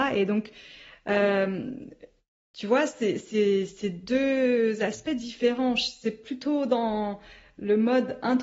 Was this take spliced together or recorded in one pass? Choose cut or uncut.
uncut